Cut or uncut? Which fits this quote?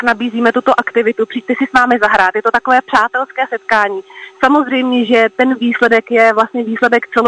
uncut